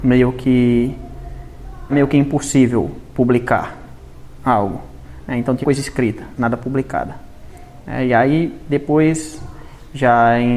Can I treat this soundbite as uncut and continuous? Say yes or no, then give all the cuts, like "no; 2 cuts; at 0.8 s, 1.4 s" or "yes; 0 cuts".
no; 3 cuts; at 1.9 s, 5.6 s, 6.4 s